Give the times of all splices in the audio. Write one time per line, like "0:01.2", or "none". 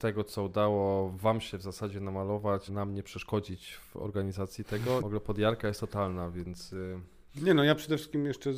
0:02.7
0:05.0

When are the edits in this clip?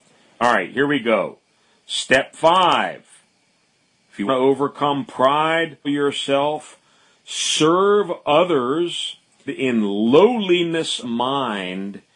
0:04.3
0:05.8
0:09.5
0:11.0

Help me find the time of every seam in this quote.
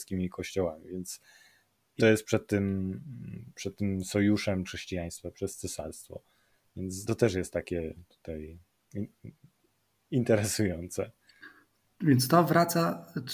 0:02.0
0:04.6
0:07.1

